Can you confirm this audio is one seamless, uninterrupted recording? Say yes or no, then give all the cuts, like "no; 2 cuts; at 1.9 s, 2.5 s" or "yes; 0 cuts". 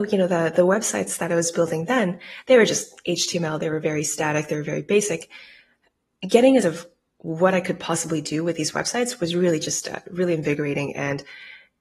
no; 1 cut; at 6.6 s